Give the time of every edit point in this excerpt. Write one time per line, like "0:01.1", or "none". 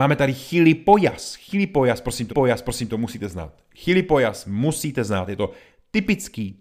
0:02.3